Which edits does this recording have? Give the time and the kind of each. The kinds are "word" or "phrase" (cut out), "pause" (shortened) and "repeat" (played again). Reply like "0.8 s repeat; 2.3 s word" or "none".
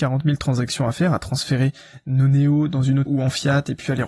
3.1 s word

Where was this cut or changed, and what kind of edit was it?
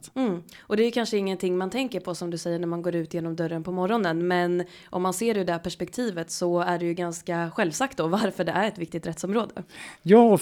none

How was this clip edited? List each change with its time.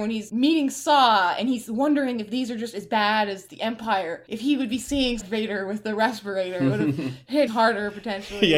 5.2 s phrase; 7.5 s word

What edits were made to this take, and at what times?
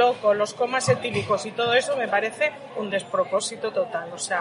none

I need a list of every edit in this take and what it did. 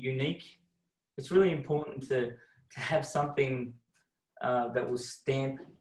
none

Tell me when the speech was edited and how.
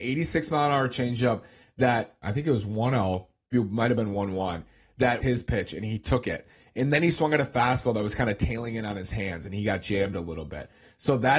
2.2 s word; 3.5 s word; 5.2 s word

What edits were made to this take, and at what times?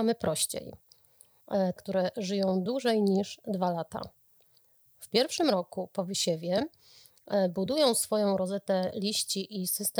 1.8 s phrase

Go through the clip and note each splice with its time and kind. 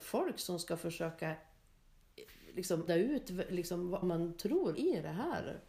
2.9 s word; 4.0 s word; 4.7 s word

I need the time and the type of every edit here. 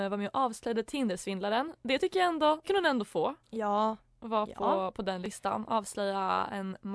2.6 s word; 3.4 s pause

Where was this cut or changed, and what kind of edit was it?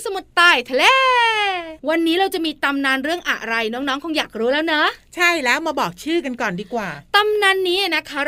1.8 s pause

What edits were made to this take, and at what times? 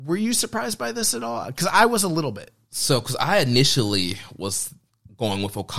none

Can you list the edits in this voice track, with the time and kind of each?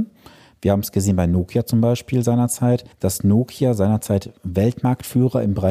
2.9 s pause

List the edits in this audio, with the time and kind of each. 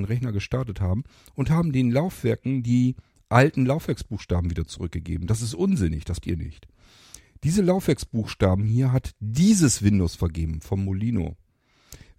6.2 s word

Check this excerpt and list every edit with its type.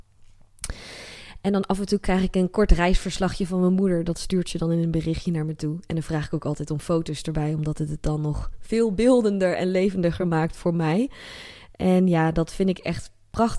none

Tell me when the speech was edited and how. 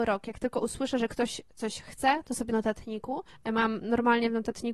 2.5 s word; 3.3 s pause

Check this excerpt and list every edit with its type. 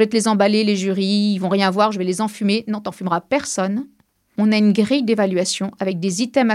none

